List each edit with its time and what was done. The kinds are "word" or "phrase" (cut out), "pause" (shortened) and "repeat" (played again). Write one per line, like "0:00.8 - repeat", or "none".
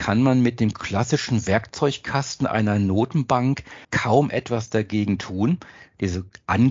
0:03.8 - pause